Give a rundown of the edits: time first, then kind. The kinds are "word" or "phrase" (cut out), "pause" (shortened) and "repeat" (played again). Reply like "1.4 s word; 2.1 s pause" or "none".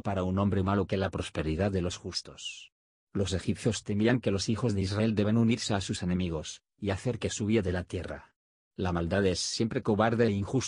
none

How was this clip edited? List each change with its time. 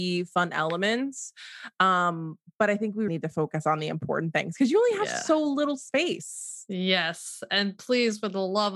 3.1 s word

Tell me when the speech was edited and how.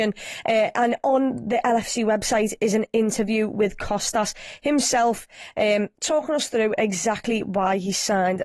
none

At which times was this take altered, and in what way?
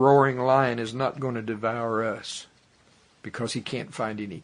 none

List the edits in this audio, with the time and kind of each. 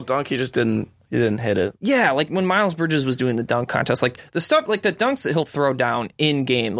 none

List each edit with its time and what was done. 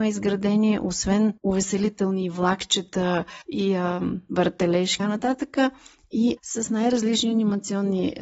1.4 s pause; 3.4 s pause; 5.0 s phrase; 6.4 s word

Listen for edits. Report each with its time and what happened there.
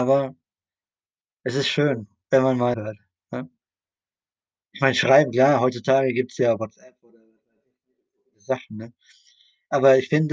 2.7 s phrase

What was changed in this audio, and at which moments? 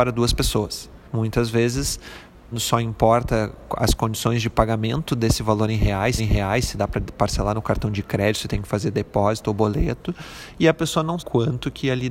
1.0 s pause; 2.5 s phrase; 6.2 s repeat; 11.2 s word

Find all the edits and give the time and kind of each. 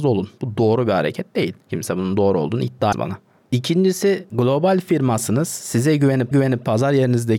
1.6 s pause; 2.9 s word; 6.3 s repeat

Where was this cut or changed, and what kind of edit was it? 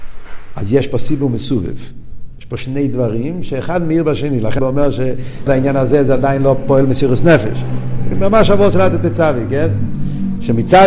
4.6 s word; 5.5 s word

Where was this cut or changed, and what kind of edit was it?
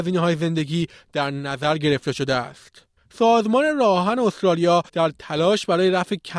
3.0 s pause; 4.9 s pause

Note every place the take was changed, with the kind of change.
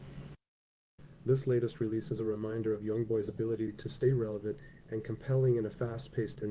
none

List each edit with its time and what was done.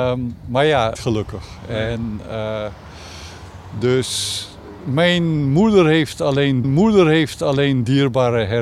0.9 s phrase; 6.6 s repeat

